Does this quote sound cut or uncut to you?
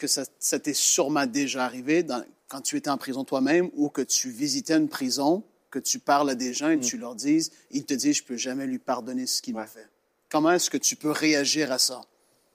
uncut